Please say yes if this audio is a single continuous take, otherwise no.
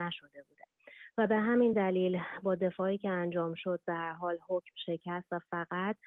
yes